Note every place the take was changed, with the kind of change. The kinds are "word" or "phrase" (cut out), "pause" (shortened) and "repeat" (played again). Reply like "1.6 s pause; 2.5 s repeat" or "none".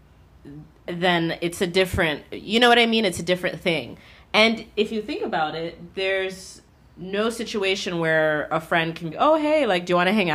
6.7 s pause; 9.1 s word